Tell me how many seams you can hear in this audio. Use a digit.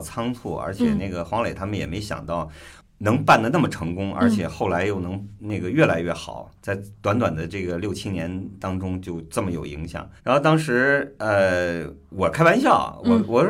2